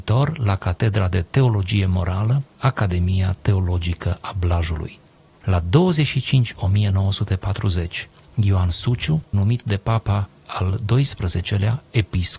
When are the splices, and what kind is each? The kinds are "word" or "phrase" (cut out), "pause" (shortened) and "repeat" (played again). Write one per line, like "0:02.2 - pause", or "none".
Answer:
0:02.5 - word
0:06.5 - word
0:09.3 - word
0:10.4 - word